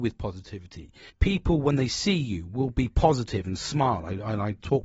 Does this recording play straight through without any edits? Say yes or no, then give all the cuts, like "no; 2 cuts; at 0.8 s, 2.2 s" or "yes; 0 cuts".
no; 1 cut; at 1.1 s